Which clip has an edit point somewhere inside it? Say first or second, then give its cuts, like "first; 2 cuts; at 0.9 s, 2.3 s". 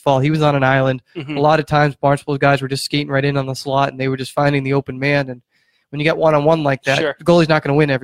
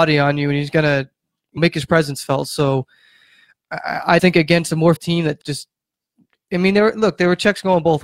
second; 4 cuts; at 1.6 s, 4.2 s, 5.0 s, 5.4 s